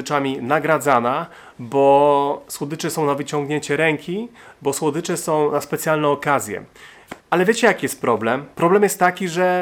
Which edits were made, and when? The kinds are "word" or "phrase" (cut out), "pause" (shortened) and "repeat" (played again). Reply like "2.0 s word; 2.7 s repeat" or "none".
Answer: 7.2 s pause; 8.5 s pause